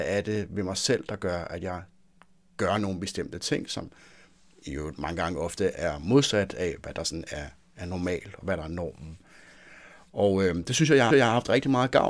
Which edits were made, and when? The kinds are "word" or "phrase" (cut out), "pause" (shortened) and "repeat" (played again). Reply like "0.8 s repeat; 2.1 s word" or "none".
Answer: 11.1 s repeat